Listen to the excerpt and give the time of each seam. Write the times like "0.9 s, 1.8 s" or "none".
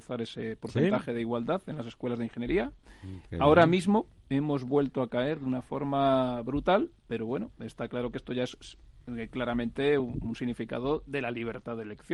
none

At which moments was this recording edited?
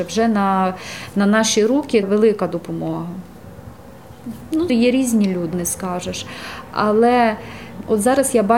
2.0 s, 4.7 s, 5.5 s

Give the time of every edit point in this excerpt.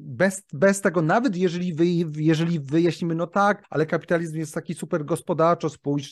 3.6 s

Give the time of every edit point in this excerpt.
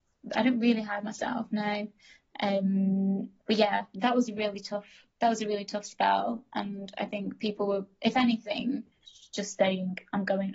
3.4 s

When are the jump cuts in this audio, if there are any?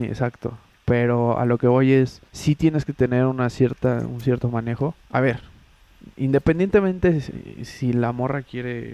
2.3 s, 5.0 s

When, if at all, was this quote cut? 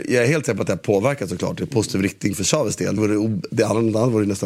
3.0 s

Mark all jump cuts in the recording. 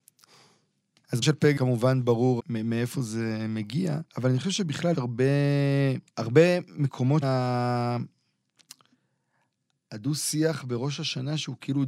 1.2 s, 1.6 s, 2.4 s, 4.1 s, 4.9 s, 6.1 s, 7.2 s

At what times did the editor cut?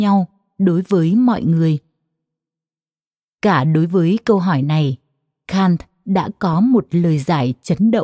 none

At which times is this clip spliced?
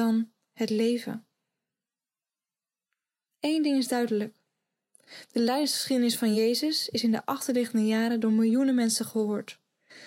none

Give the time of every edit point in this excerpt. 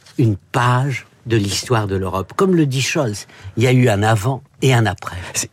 4.5 s

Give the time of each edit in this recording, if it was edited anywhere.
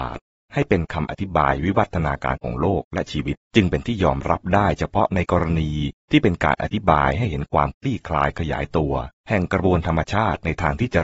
3.4 s, 9.2 s

